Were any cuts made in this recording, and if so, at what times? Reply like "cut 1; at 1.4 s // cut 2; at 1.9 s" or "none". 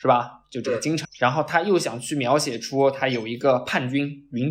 cut 1; at 1.0 s

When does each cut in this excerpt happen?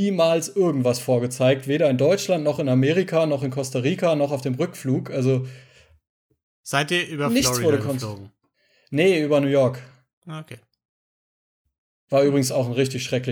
none

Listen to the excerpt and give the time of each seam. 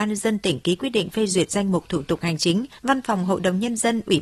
cut 1; at 2.8 s

